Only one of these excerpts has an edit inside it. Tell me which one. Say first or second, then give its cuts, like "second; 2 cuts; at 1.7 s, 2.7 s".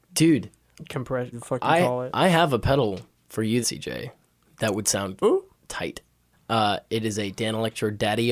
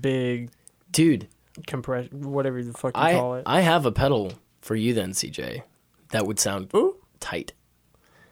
first; 3 cuts; at 1.3 s, 3.6 s, 6.3 s